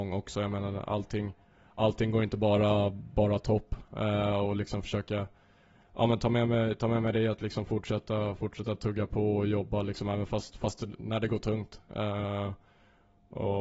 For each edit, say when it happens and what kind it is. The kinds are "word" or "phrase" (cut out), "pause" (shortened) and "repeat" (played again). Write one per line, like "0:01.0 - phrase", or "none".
none

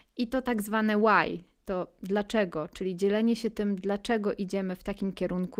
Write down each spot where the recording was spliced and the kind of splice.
none

